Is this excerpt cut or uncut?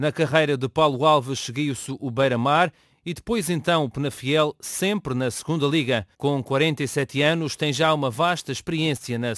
cut